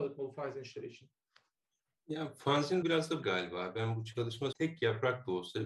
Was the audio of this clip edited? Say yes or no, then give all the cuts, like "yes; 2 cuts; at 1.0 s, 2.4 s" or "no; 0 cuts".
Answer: yes; 3 cuts; at 2.8 s, 3.2 s, 4.5 s